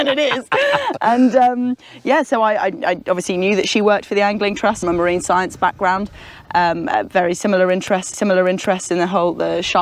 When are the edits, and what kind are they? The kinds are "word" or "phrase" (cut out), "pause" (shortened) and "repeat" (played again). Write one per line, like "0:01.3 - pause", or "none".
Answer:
0:04.8 - phrase
0:08.1 - repeat